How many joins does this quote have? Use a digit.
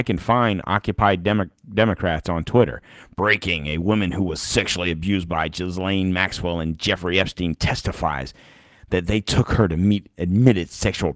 0